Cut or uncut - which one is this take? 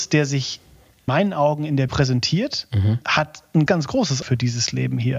cut